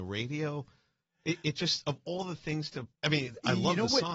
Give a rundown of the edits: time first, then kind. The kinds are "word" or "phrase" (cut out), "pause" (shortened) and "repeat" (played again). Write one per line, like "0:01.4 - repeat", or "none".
0:02.9 - pause